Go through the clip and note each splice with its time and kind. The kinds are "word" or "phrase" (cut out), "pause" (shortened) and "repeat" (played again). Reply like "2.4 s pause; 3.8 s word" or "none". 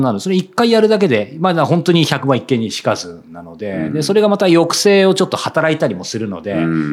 none